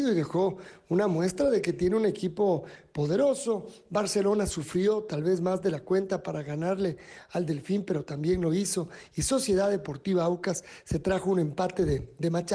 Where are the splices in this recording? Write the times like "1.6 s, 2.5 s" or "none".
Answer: none